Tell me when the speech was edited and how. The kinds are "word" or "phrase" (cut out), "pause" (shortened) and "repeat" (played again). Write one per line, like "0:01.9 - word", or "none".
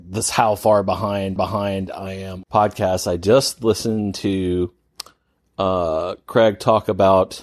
0:01.4 - repeat
0:02.4 - word